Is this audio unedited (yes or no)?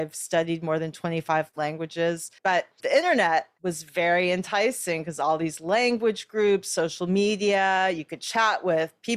no